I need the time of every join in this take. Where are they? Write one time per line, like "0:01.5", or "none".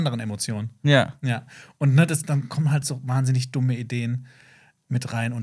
none